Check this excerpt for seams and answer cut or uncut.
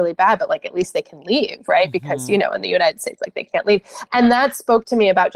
uncut